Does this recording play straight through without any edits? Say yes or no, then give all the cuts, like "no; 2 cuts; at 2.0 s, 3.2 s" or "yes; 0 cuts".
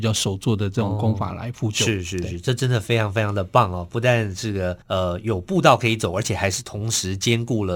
no; 1 cut; at 4.8 s